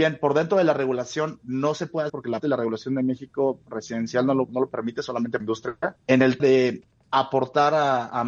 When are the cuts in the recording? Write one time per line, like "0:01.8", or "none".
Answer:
0:02.1
0:02.4
0:04.5
0:05.4
0:06.0
0:06.4